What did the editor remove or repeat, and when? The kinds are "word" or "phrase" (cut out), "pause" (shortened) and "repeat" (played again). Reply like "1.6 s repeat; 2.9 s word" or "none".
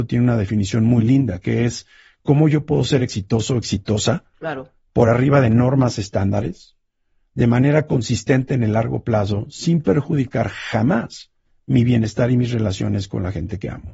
none